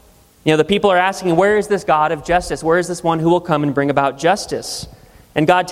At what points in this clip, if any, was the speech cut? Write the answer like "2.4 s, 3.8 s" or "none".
none